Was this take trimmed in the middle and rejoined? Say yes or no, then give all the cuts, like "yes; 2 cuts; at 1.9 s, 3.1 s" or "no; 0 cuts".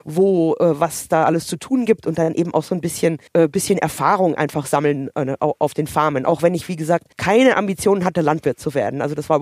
yes; 2 cuts; at 3.3 s, 7.1 s